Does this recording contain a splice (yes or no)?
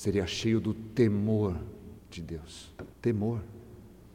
yes